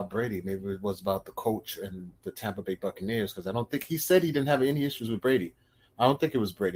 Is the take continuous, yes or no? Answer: yes